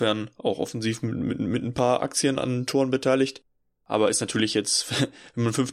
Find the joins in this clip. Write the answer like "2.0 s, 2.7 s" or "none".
2.4 s